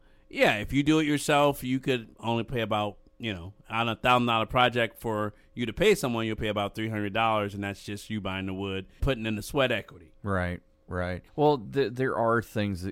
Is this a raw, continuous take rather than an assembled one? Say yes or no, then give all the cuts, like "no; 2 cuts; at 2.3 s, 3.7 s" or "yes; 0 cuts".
no; 4 cuts; at 2.1 s, 9.0 s, 10.2 s, 11.3 s